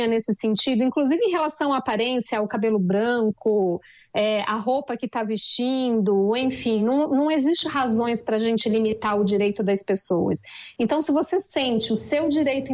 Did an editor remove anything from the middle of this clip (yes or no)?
no